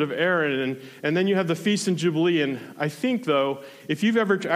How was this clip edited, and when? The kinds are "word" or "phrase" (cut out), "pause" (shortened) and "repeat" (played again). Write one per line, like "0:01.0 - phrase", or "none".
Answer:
none